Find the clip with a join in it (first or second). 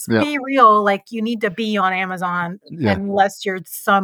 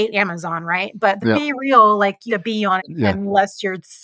second